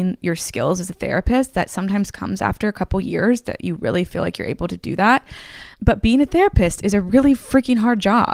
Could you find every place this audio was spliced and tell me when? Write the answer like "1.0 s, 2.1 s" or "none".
none